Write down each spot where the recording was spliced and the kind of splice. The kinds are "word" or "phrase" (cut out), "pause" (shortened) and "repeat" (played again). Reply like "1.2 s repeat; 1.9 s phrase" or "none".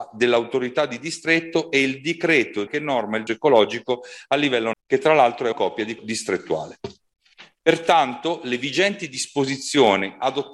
2.7 s word; 3.3 s word; 4.7 s word; 5.5 s word; 6.0 s word

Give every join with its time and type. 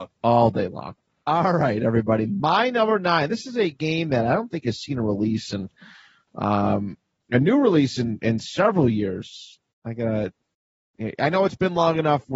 none

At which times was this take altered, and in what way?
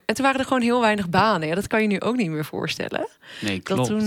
none

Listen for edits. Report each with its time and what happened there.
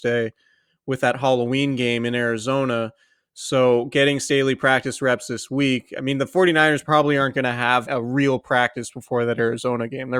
7.8 s word

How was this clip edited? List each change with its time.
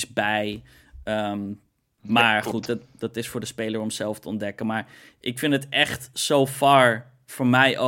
none

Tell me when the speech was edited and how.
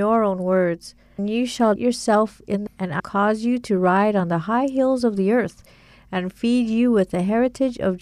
1.2 s word; 1.8 s word; 2.7 s word; 3.0 s word

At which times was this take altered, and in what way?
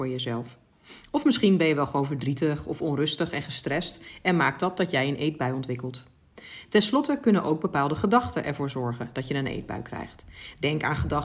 none

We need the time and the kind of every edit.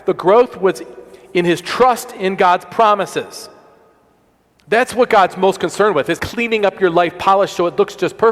6.2 s word

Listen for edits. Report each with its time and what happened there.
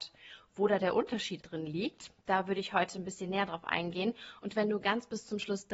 1.4 s word

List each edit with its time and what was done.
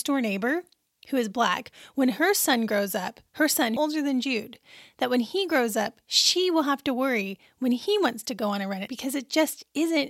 3.8 s phrase; 8.9 s word

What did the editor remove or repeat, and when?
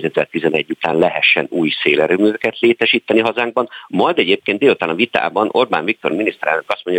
none

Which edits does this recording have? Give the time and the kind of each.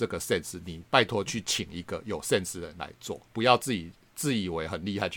3.3 s pause

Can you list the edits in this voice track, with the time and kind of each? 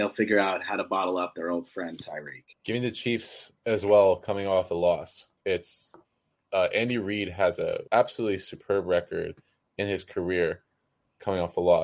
2.5 s pause; 5.4 s pause; 7.9 s pause

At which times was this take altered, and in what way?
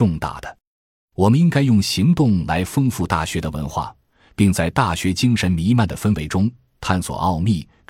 none

